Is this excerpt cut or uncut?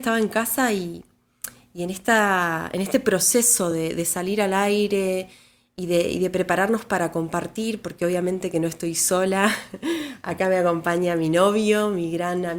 uncut